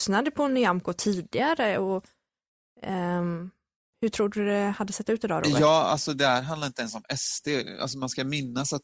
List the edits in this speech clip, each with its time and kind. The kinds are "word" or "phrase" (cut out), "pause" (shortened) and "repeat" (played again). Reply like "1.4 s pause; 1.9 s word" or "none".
none